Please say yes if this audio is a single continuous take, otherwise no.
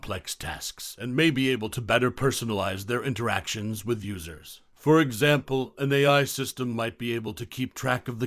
yes